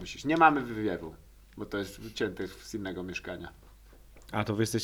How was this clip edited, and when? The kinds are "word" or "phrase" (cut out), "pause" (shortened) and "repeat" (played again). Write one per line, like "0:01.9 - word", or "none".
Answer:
none